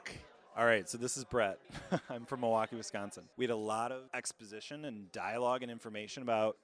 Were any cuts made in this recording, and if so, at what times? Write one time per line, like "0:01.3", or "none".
0:01.6
0:03.3
0:04.1